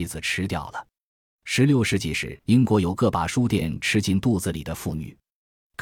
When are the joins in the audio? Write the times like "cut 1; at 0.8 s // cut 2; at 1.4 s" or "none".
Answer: cut 1; at 2.4 s

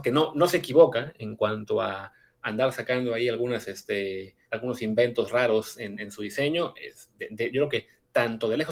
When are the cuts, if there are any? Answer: cut 1; at 4.4 s

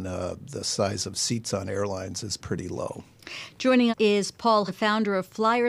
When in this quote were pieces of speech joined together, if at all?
cut 1; at 2.4 s // cut 2; at 3.9 s // cut 3; at 4.7 s

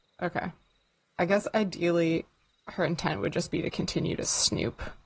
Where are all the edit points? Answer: none

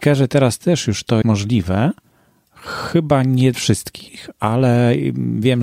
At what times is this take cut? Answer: cut 1; at 1.2 s // cut 2; at 3.5 s

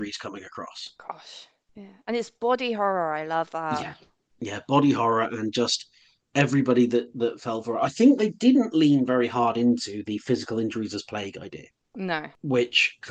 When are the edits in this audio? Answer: none

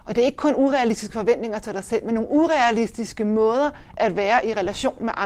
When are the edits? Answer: none

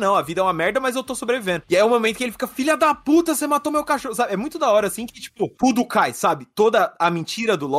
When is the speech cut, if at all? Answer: none

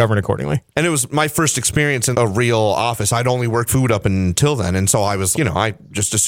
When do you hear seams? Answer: cut 1; at 2.1 s // cut 2; at 3.7 s // cut 3; at 5.3 s

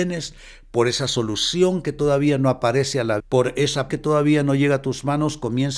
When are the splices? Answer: cut 1; at 3.2 s // cut 2; at 3.9 s

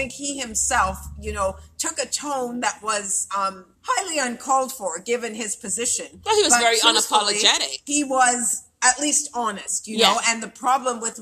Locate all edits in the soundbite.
cut 1; at 3.7 s

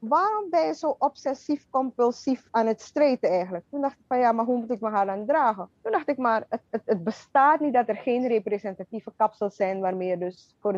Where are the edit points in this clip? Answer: cut 1; at 5.7 s

